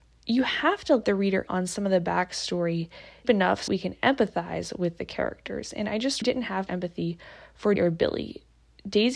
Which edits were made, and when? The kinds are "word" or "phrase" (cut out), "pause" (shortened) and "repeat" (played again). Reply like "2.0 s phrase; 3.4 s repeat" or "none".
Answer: 1.0 s word; 1.5 s word; 3.2 s word; 3.7 s word; 6.2 s word; 6.7 s word; 7.8 s word